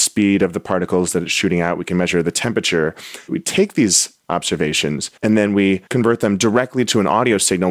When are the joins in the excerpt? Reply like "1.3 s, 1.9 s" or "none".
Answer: 5.2 s, 5.9 s